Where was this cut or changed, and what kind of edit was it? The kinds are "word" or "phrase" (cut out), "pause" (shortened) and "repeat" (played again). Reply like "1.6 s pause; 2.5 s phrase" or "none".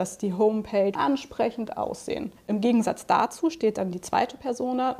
0.9 s word

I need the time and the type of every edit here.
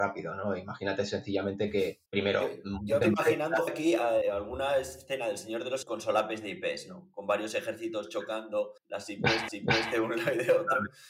2.1 s pause; 3.0 s word; 3.7 s word; 4.2 s word; 5.8 s word; 8.8 s pause; 9.5 s repeat

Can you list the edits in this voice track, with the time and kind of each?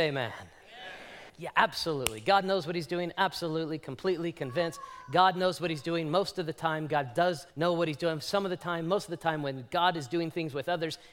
1.3 s pause; 7.5 s pause

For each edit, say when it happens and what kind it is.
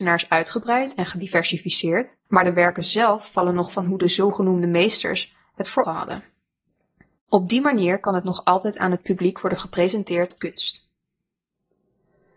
2.3 s pause; 3.7 s phrase; 5.8 s word; 10.4 s word

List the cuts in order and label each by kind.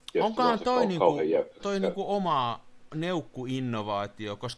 1.6 s word

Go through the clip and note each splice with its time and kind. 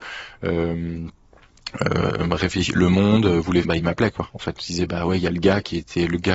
3.6 s phrase

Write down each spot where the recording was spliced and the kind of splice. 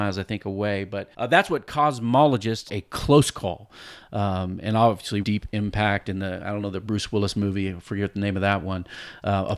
1.1 s pause; 2.7 s phrase; 5.2 s phrase

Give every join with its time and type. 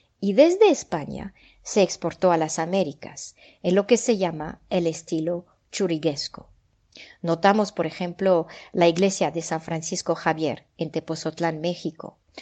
none

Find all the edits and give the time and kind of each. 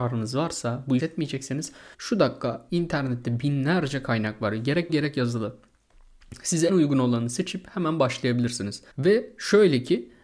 1.0 s phrase; 1.9 s pause; 2.7 s phrase; 4.9 s word; 6.7 s word; 8.9 s pause

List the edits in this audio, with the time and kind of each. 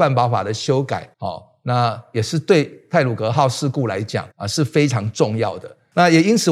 1.1 s pause; 4.3 s pause

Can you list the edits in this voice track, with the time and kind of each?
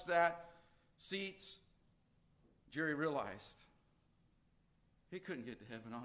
none

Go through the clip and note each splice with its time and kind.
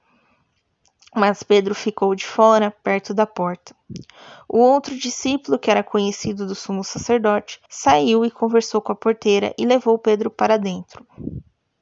7.7 s pause

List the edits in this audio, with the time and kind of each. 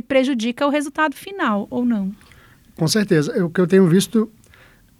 none

